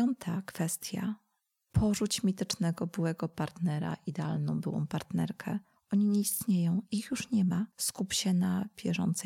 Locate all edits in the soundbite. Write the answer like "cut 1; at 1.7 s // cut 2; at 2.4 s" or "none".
none